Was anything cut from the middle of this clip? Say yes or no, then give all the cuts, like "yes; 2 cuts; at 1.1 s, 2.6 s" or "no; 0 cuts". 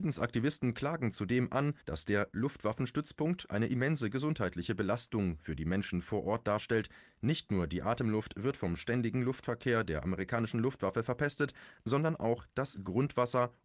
yes; 1 cut; at 1.8 s